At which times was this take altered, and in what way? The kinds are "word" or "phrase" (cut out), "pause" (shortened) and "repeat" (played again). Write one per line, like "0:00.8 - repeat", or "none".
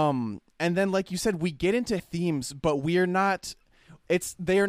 0:02.0 - word